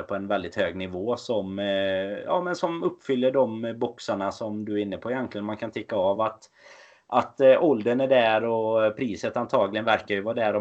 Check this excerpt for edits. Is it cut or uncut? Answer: uncut